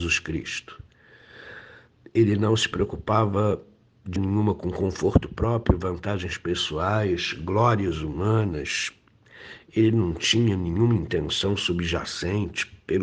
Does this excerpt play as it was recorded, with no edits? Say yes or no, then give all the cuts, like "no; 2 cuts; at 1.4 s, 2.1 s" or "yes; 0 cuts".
no; 1 cut; at 4.2 s